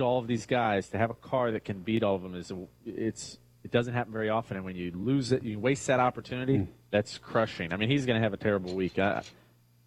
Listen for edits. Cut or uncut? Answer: uncut